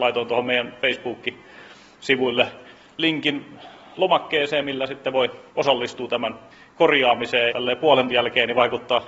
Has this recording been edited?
yes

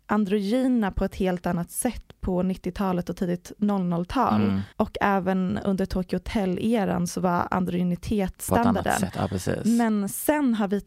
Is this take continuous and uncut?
no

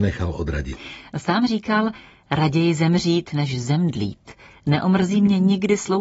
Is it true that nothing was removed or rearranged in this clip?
yes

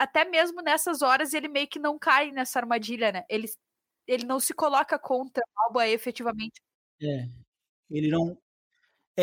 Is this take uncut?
yes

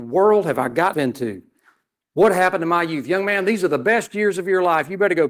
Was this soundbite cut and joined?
yes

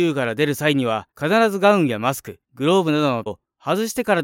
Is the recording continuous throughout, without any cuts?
no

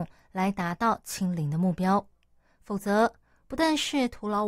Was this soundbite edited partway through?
no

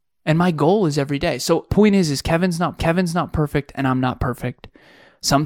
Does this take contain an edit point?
yes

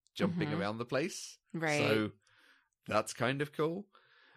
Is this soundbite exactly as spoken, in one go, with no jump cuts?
yes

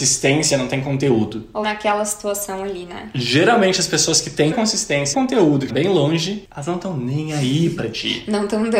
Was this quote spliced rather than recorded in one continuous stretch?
yes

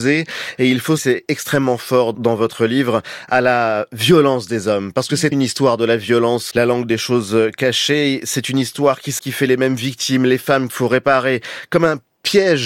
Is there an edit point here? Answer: yes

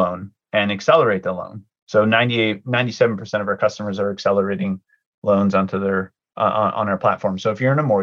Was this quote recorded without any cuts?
yes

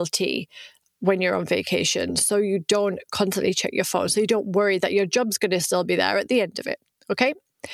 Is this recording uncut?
yes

